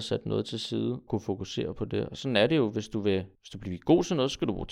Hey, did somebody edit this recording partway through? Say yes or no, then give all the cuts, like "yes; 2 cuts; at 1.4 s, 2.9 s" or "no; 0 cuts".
yes; 2 cuts; at 1.1 s, 3.3 s